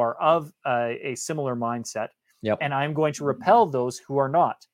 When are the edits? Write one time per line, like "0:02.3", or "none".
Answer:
none